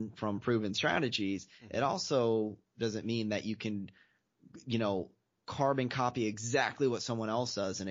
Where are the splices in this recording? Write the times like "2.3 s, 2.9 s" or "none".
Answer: none